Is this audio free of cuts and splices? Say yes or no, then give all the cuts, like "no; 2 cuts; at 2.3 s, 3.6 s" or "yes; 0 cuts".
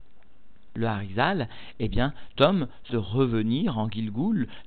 no; 2 cuts; at 2.4 s, 2.9 s